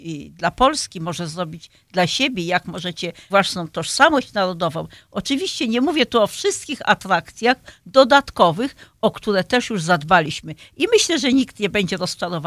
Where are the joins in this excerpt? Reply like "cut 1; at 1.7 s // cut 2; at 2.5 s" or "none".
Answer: cut 1; at 3.3 s